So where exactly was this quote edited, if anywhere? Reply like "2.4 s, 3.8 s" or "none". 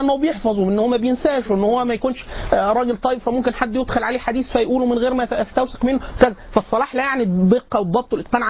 none